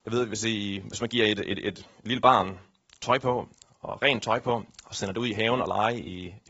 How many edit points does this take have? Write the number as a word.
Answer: zero